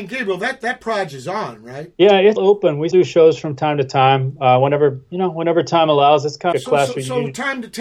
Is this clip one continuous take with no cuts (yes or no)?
no